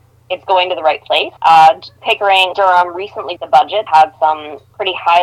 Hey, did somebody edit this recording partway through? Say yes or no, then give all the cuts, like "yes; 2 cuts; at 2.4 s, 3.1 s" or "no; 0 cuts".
yes; 4 cuts; at 1.4 s, 2.5 s, 3.4 s, 3.9 s